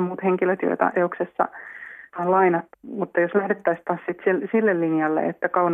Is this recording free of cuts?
no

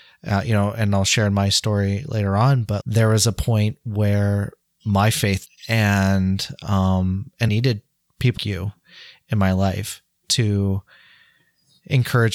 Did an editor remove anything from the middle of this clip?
yes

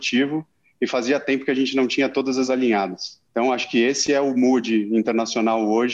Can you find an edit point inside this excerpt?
yes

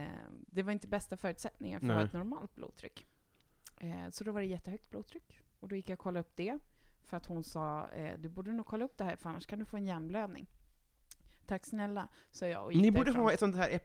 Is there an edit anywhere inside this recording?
no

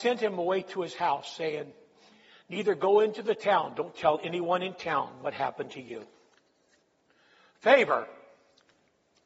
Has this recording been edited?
no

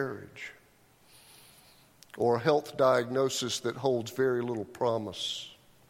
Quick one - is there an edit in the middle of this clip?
no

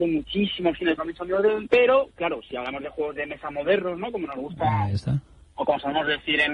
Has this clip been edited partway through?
yes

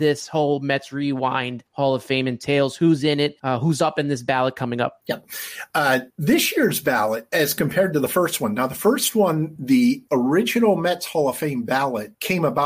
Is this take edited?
no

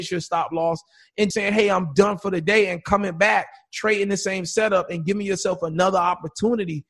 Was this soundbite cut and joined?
yes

